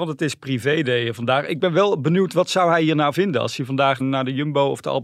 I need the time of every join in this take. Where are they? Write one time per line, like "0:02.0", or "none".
0:03.1
0:04.0

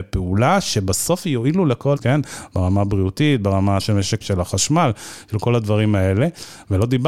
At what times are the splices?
0:02.0
0:03.8
0:04.2

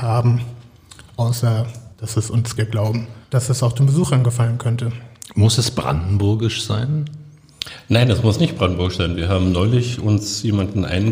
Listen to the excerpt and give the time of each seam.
0:01.9
0:02.6
0:03.2

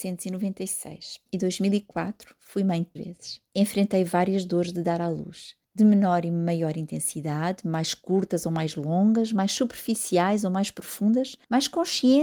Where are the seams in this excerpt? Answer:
0:01.3
0:03.0
0:03.5
0:05.6

